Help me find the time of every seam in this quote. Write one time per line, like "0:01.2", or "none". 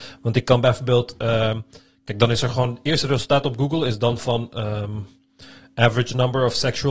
none